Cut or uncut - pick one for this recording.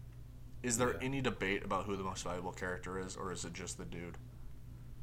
uncut